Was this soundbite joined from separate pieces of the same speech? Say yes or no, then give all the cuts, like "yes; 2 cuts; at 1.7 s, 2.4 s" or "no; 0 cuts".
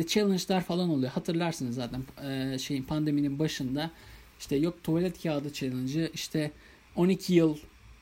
no; 0 cuts